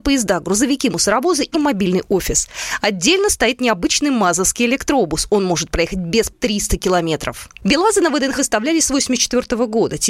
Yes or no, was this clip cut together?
yes